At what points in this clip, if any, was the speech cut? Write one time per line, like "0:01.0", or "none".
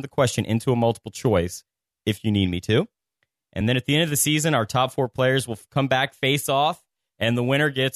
none